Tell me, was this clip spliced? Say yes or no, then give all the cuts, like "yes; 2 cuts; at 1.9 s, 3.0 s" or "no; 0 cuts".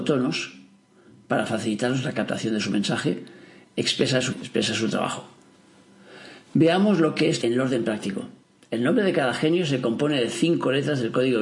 yes; 3 cuts; at 4.3 s, 7.4 s, 8.4 s